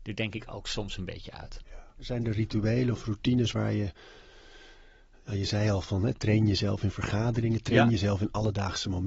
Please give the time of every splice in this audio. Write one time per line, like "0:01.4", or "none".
none